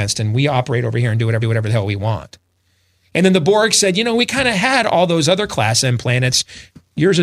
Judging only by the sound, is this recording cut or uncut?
cut